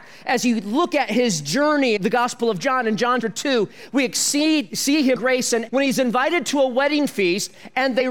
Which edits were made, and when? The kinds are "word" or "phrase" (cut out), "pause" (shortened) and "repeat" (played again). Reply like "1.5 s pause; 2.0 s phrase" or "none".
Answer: 2.0 s word; 3.2 s word; 5.2 s word; 5.7 s word